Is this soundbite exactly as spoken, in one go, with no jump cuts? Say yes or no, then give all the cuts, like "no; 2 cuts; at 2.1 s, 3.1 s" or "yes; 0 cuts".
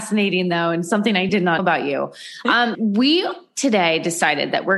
no; 3 cuts; at 1.3 s, 1.6 s, 2.7 s